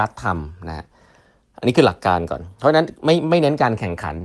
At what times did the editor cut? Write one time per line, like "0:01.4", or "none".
none